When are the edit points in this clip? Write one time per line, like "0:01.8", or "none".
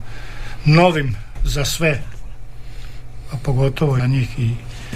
0:04.0